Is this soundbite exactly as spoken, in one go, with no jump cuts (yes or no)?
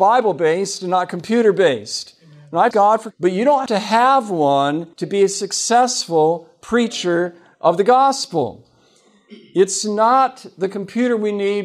no